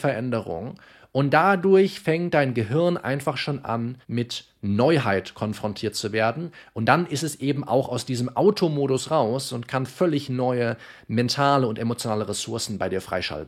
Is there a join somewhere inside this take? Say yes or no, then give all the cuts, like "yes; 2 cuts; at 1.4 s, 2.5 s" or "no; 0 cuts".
yes; 1 cut; at 4.0 s